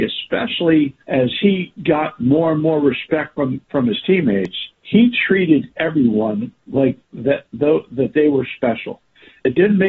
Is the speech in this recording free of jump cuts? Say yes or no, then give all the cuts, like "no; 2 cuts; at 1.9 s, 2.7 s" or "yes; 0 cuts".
no; 3 cuts; at 1.0 s, 4.7 s, 6.6 s